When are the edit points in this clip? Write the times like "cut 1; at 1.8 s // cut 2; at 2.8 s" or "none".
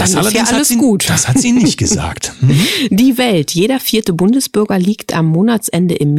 none